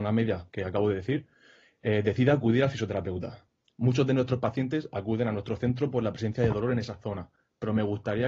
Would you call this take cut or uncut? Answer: uncut